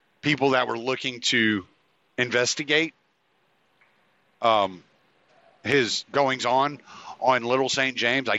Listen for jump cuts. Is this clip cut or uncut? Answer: uncut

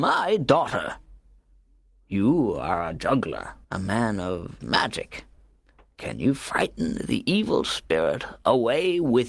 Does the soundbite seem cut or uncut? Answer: cut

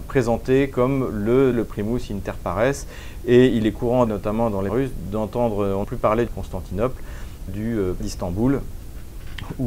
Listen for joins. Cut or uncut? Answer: cut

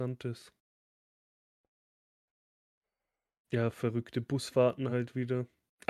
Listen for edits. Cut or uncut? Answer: uncut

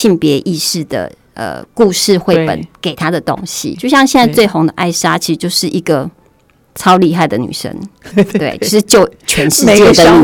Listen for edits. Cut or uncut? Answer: cut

